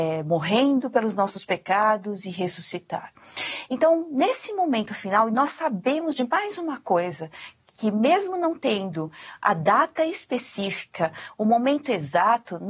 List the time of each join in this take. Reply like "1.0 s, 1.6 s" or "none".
none